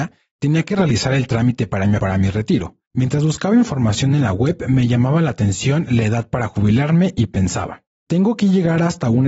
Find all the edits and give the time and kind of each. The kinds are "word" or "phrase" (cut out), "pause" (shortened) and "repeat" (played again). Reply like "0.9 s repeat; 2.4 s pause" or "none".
2.0 s phrase